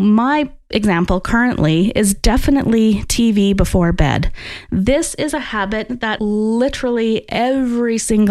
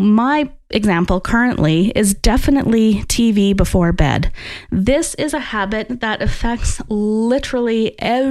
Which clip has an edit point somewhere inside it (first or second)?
first